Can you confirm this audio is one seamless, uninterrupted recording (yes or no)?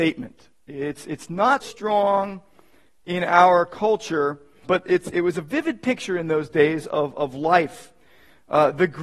no